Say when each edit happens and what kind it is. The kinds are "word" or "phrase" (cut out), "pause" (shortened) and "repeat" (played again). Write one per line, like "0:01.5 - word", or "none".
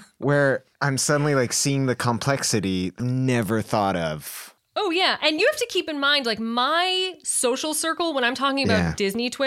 0:03.0 - word